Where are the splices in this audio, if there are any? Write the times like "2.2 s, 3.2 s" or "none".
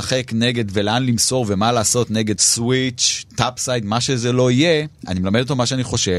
2.4 s